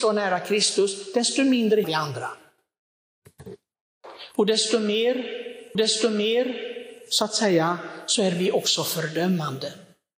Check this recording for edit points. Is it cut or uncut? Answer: cut